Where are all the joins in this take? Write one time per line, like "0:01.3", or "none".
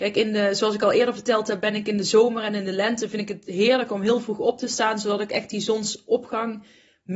none